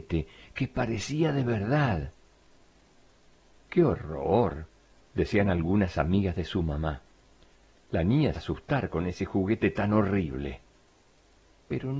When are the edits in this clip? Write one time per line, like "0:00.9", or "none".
0:08.3